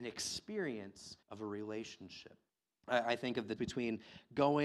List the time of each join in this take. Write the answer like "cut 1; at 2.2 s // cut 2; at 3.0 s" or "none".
cut 1; at 1.2 s // cut 2; at 2.5 s // cut 3; at 3.6 s